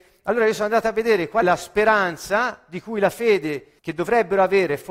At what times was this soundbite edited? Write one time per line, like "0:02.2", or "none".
0:01.4
0:03.8